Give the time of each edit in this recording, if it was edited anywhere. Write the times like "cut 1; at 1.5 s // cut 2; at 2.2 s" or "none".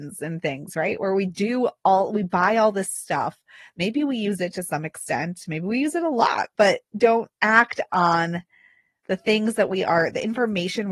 none